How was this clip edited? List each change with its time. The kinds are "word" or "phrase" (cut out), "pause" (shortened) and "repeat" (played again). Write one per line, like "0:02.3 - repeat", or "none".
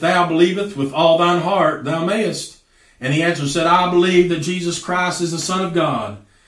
none